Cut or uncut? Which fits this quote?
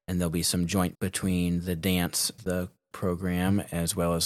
cut